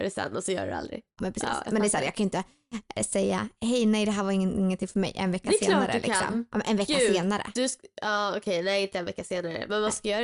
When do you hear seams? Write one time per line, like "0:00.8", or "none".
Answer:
0:01.2